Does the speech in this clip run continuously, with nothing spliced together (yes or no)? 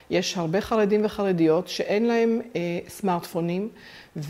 yes